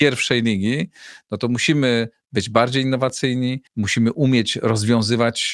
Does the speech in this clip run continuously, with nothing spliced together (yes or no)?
no